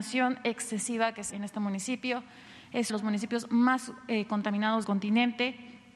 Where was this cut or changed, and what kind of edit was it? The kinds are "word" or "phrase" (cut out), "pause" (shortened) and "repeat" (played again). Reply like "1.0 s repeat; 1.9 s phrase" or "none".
1.3 s phrase; 2.9 s phrase; 4.8 s word